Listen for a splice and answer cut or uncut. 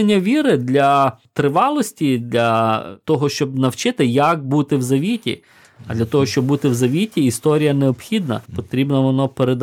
cut